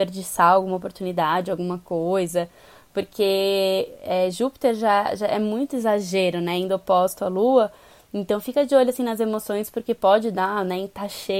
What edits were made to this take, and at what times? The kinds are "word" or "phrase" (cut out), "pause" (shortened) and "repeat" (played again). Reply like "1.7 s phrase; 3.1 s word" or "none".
none